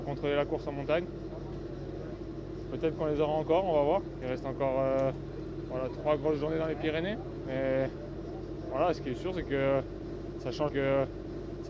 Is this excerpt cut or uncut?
cut